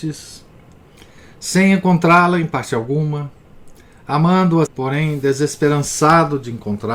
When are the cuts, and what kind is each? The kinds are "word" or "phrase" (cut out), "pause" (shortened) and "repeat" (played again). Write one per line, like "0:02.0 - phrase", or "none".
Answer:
0:04.7 - word